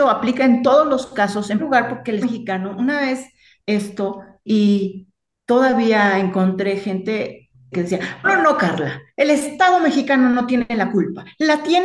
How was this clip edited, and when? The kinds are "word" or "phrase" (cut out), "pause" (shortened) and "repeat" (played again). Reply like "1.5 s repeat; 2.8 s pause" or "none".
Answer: 1.6 s word; 2.2 s word; 3.6 s word; 4.5 s word; 7.7 s word; 8.2 s word